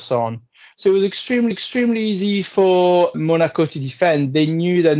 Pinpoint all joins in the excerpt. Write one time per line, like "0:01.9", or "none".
0:01.5
0:03.1